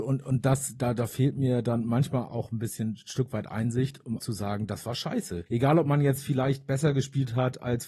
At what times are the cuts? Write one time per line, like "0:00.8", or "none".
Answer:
0:02.3
0:04.2
0:05.5